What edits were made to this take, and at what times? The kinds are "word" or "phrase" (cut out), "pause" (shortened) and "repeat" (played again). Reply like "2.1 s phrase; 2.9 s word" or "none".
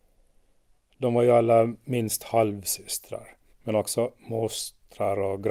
3.5 s pause